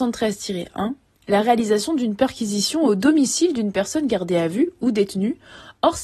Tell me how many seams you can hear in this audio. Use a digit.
1